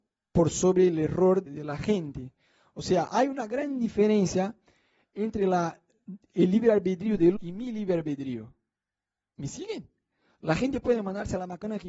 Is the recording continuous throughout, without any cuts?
no; 2 cuts; at 1.5 s, 7.4 s

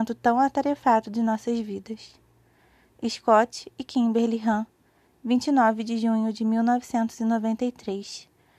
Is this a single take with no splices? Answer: yes; 0 cuts

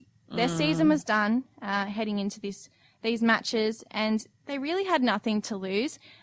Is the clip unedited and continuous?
yes; 0 cuts

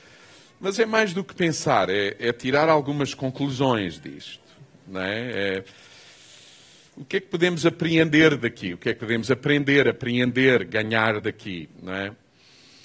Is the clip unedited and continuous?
yes; 0 cuts

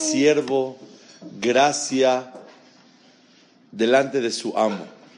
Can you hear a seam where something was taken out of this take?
no; 0 cuts

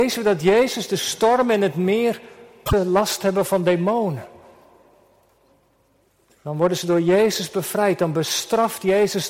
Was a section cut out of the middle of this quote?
no; 0 cuts

